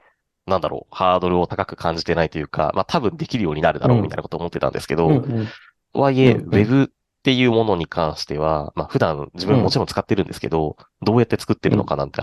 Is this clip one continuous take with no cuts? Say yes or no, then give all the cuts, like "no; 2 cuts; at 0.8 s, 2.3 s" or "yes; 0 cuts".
yes; 0 cuts